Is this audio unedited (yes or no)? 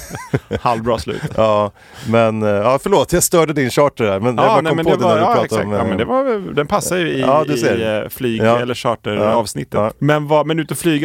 yes